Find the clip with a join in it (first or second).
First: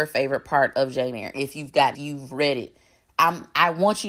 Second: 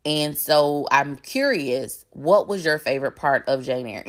first